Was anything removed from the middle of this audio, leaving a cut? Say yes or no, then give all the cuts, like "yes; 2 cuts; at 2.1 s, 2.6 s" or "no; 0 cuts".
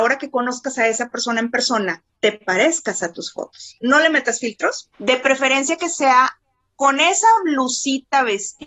no; 0 cuts